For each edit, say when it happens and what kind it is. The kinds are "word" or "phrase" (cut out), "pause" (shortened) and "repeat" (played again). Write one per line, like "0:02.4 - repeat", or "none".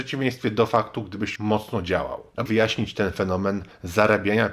0:01.4 - word
0:02.5 - word